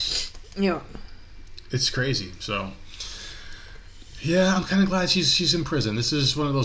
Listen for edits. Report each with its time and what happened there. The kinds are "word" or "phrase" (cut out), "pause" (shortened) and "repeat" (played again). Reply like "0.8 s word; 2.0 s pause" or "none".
4.5 s word